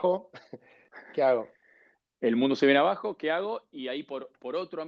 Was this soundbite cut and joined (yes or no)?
no